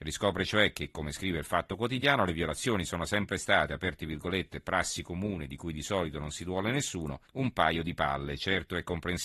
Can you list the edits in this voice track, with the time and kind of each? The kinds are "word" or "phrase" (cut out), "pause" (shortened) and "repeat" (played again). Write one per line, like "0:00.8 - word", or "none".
0:07.2 - pause